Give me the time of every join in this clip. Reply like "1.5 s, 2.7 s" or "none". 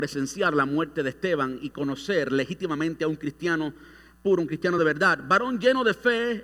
none

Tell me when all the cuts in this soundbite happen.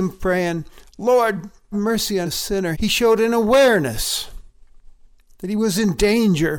1.7 s, 2.2 s, 2.7 s

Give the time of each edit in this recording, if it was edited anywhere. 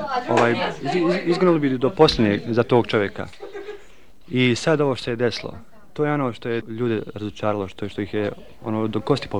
6.6 s

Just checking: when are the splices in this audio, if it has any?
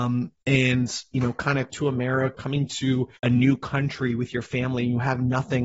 1.7 s, 2.3 s, 3.2 s

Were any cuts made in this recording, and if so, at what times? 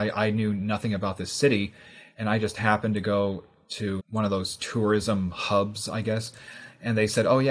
none

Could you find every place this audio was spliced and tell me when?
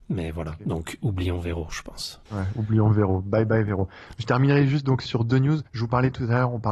2.3 s, 5.1 s, 5.7 s

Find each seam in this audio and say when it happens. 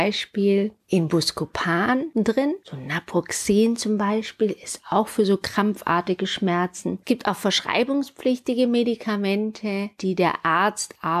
none

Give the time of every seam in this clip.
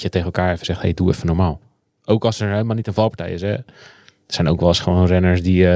none

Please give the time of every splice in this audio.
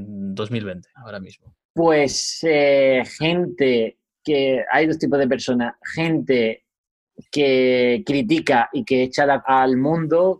0.9 s, 1.6 s, 9.4 s

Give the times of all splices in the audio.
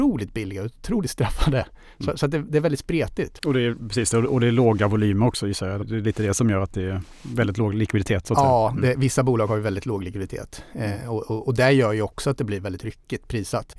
5.8 s

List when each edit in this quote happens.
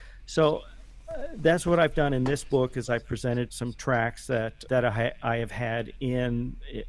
3.5 s, 4.7 s

